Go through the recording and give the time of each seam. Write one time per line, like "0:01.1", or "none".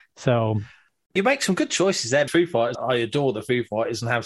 0:01.2
0:02.3
0:02.7